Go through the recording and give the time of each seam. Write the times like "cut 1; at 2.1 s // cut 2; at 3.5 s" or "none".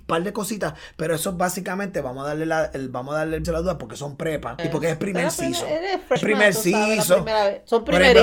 cut 1; at 3.4 s // cut 2; at 4.6 s // cut 3; at 6.2 s